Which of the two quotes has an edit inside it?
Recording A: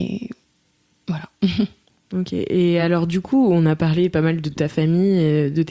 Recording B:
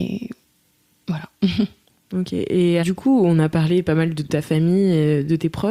B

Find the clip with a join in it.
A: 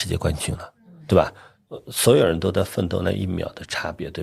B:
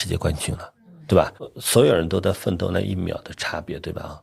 B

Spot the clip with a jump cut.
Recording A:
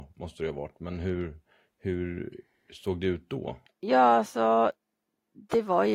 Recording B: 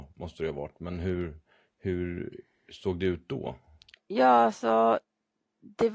A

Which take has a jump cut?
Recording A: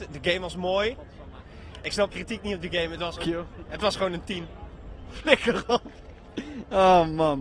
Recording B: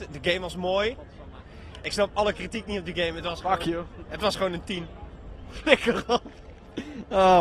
A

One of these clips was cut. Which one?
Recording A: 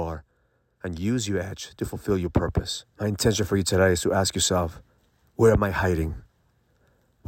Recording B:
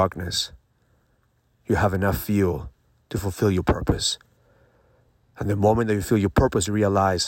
A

